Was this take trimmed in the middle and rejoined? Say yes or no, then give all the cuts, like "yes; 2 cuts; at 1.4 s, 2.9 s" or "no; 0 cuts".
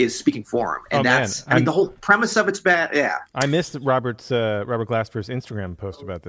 no; 0 cuts